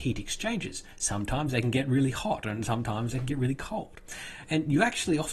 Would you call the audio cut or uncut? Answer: uncut